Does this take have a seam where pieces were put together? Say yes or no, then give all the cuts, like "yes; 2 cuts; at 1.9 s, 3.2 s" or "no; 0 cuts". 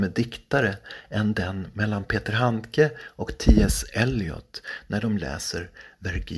no; 0 cuts